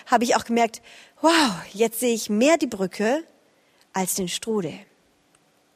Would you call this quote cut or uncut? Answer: uncut